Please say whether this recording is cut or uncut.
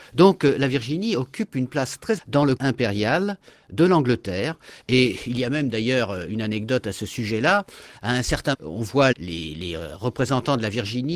cut